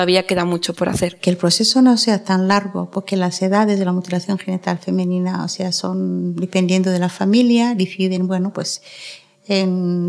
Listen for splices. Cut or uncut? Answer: uncut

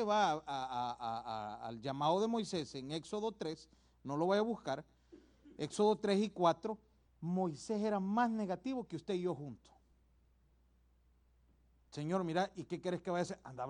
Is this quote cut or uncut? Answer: uncut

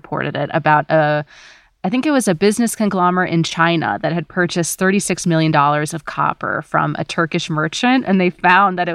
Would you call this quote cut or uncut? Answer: uncut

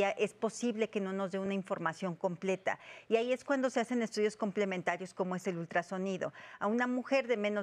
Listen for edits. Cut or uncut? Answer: uncut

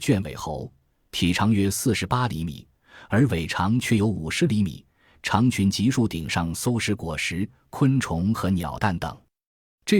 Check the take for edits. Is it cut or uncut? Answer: uncut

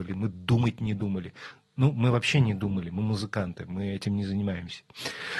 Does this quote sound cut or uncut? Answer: uncut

